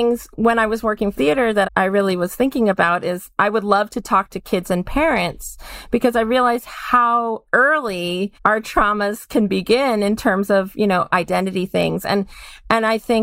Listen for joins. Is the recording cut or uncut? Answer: cut